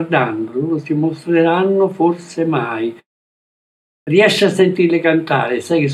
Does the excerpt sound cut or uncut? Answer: uncut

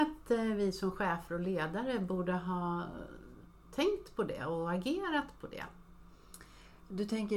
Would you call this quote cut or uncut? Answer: uncut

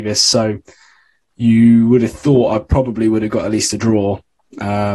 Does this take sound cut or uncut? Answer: uncut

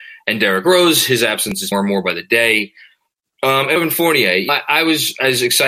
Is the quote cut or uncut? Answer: cut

